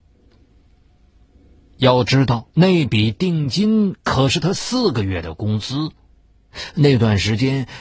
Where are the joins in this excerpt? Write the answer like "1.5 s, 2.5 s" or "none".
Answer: 2.5 s

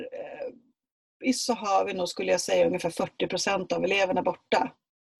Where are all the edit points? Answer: 1.3 s

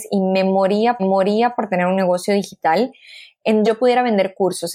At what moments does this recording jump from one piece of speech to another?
1.0 s, 3.6 s

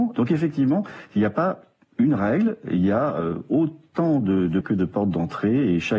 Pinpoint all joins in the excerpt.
4.6 s

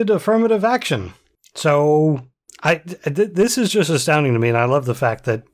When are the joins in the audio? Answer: none

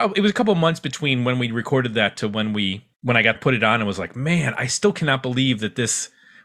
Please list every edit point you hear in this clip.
2.9 s, 3.3 s

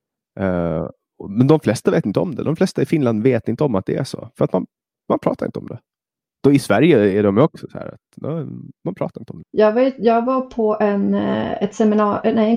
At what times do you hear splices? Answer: none

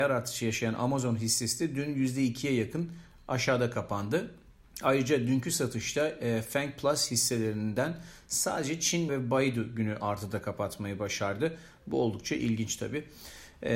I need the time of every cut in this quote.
4.6 s, 9.1 s

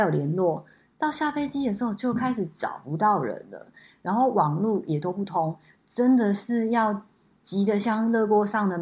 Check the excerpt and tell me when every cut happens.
none

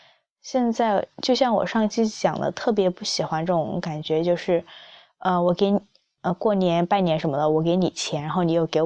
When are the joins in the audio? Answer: none

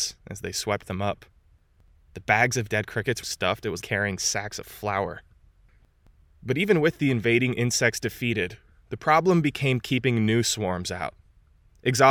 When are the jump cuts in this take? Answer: 3.2 s, 3.8 s

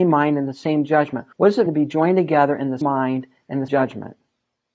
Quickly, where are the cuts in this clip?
1.3 s, 1.7 s, 2.8 s, 3.7 s

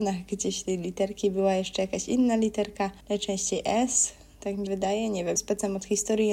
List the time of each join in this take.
3.0 s, 4.7 s, 5.4 s

